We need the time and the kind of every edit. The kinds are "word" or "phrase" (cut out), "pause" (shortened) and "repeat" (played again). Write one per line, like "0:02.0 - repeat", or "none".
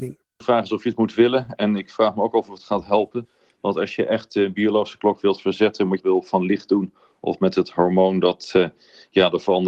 0:06.0 - phrase